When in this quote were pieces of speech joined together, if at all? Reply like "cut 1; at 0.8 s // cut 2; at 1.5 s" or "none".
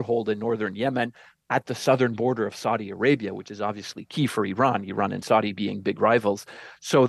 none